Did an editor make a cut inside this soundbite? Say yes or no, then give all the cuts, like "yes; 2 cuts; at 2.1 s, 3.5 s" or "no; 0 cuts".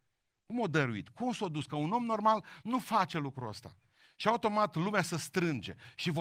no; 0 cuts